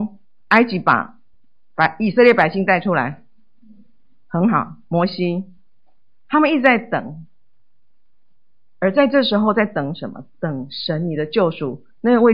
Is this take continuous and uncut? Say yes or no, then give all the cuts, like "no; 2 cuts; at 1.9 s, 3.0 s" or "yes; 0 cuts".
yes; 0 cuts